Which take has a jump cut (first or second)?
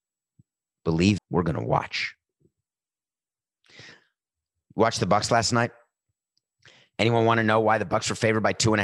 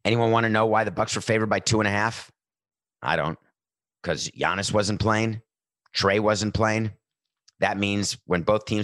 first